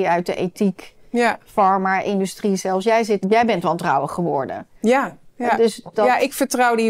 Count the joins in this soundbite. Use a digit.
3